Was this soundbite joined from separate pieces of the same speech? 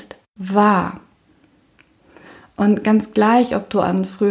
no; 0 cuts

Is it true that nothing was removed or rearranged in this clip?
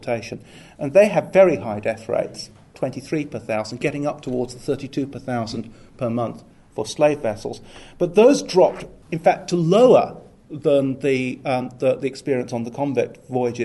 no; 1 cut; at 9.0 s

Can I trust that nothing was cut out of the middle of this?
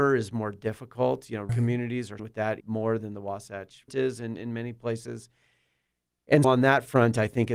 no; 5 cuts; at 1.5 s, 2.2 s, 2.6 s, 3.9 s, 6.4 s

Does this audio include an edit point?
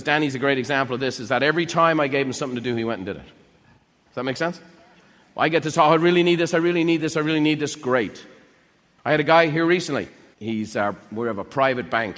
no; 0 cuts

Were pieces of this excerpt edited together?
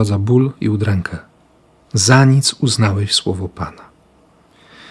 no; 0 cuts

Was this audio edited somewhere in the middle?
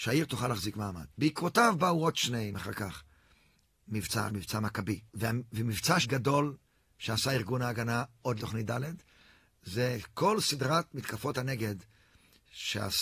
yes; 7 cuts; at 1.1 s, 2.5 s, 4.3 s, 5.1 s, 6.0 s, 6.9 s, 8.4 s

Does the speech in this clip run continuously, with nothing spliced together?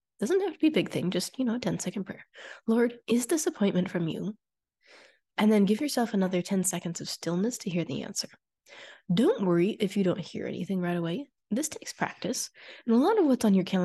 no; 1 cut; at 3.0 s

